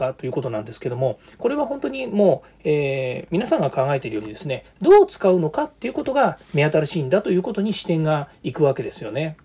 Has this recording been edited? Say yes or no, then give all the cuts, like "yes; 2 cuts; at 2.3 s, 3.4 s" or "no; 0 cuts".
no; 0 cuts